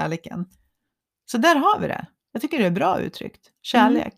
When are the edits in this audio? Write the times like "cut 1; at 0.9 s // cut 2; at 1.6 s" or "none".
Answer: cut 1; at 1.1 s